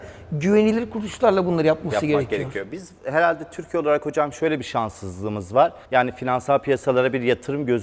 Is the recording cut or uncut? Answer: cut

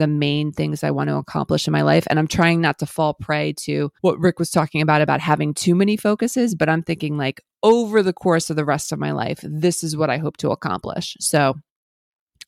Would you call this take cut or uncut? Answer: cut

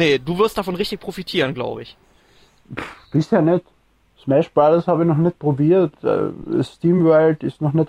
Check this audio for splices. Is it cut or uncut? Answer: uncut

